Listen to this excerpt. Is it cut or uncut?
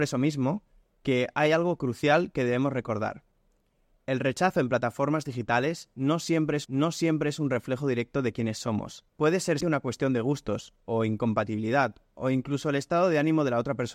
cut